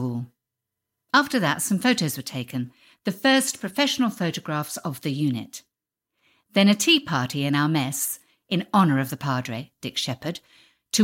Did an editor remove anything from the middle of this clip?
no; 0 cuts

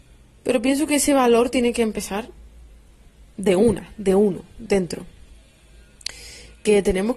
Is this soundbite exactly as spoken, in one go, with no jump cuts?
yes; 0 cuts

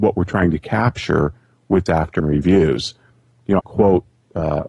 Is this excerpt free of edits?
no; 3 cuts; at 1.9 s, 2.2 s, 3.6 s

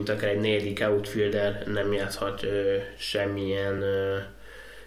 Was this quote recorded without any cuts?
yes; 0 cuts

